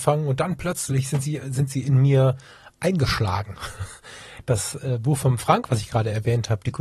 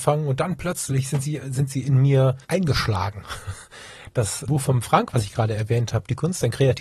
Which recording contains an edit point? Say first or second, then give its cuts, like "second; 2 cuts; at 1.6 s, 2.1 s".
second; 2 cuts; at 2.4 s, 4.5 s